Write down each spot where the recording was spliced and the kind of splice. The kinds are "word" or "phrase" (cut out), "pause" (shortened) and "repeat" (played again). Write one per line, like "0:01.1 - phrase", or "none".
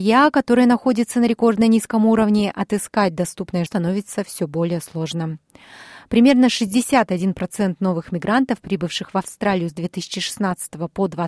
0:03.7 - word